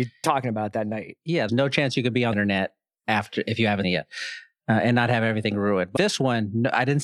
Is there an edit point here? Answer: yes; 4 cuts; at 1.5 s, 2.3 s, 3.8 s, 6.0 s

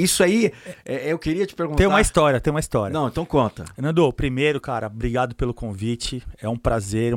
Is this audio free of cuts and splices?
yes; 0 cuts

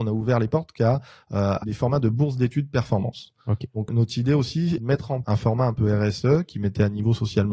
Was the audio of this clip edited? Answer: yes; 4 cuts; at 1.6 s, 3.9 s, 4.8 s, 5.2 s

